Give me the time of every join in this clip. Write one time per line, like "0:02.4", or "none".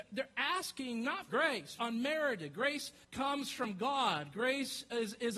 0:01.3
0:01.8
0:03.0